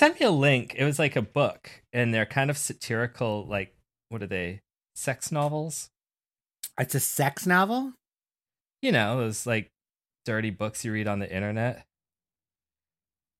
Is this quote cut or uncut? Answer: uncut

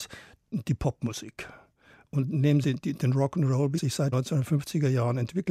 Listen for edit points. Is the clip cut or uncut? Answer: cut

